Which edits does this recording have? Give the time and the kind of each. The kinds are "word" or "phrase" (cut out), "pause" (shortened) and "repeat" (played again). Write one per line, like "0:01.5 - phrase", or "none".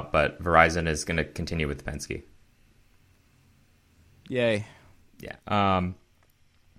0:05.4 - pause